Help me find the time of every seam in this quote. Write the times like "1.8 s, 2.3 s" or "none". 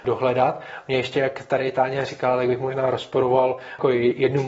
none